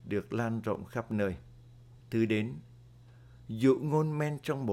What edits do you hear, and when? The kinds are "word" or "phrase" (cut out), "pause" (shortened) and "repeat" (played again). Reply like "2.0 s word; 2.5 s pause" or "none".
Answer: 2.0 s pause